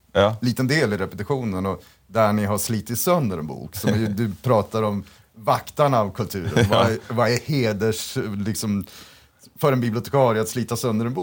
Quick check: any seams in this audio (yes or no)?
no